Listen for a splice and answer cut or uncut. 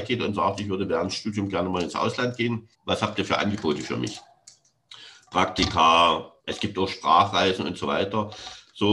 cut